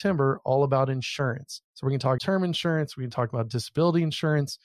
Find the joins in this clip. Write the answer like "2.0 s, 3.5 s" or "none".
1.6 s, 2.2 s